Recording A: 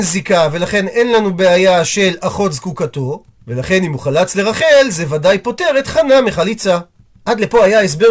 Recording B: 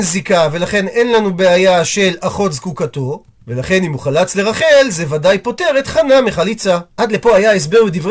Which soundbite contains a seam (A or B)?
B